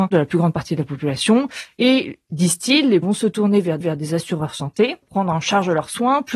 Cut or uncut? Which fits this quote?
cut